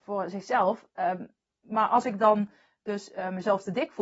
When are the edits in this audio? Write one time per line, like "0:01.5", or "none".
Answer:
none